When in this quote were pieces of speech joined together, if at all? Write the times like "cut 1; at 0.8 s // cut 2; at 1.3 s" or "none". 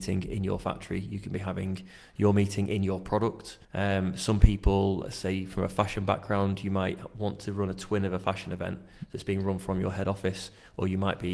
cut 1; at 3.6 s